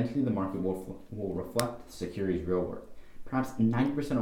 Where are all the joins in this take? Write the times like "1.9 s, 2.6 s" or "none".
none